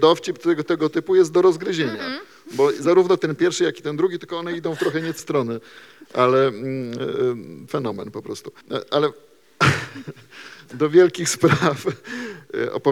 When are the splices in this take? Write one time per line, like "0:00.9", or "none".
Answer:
0:05.2
0:07.7
0:08.6